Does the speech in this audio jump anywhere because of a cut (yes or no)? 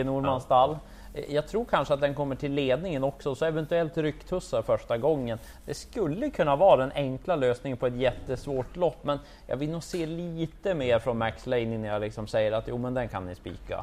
no